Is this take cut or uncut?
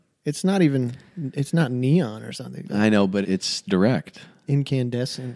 cut